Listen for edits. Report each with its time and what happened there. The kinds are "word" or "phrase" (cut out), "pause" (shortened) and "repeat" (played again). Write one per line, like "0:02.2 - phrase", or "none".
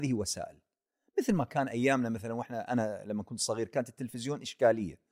none